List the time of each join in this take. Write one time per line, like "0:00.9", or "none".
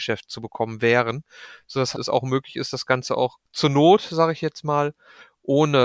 0:01.9